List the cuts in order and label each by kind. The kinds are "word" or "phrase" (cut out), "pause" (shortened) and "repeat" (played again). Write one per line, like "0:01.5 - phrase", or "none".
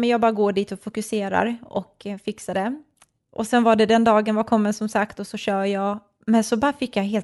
none